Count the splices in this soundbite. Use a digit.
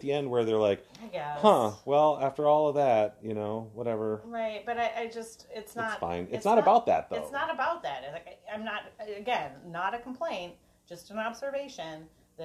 0